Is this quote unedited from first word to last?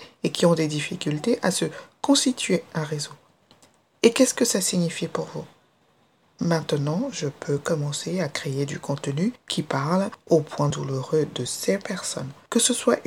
yes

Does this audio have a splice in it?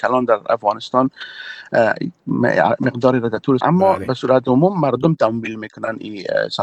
yes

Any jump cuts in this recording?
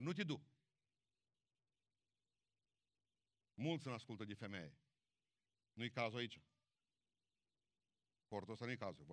no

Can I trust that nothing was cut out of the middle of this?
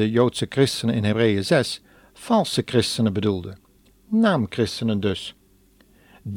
yes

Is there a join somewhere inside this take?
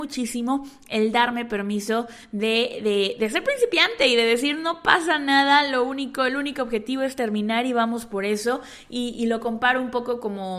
no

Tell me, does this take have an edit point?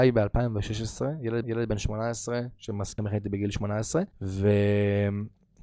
yes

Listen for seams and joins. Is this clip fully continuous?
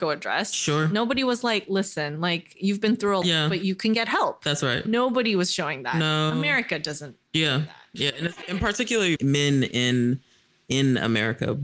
no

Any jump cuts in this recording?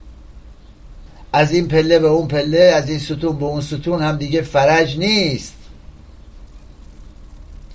yes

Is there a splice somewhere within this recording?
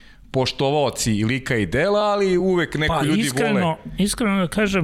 no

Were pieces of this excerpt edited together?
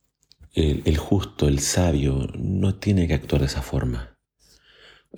no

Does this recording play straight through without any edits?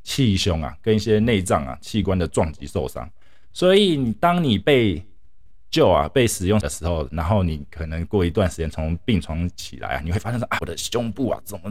no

